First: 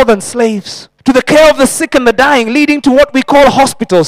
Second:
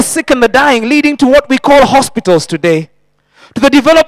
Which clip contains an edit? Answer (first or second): first